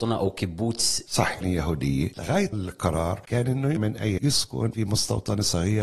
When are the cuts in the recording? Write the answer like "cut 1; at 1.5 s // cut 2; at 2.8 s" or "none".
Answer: cut 1; at 1.1 s // cut 2; at 1.4 s // cut 3; at 2.5 s // cut 4; at 3.8 s // cut 5; at 4.2 s